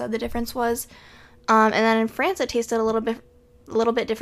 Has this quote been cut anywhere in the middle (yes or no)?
no